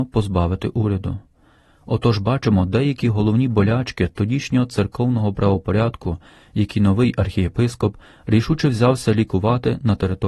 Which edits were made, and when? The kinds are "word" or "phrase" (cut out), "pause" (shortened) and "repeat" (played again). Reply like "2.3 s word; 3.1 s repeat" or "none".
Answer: none